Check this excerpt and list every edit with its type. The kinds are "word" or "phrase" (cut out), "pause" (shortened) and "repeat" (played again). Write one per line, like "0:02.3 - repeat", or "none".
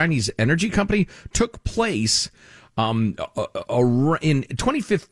none